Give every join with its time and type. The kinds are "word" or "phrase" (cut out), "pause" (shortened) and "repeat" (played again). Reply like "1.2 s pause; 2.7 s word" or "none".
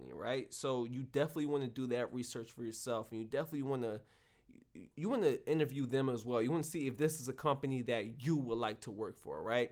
4.9 s pause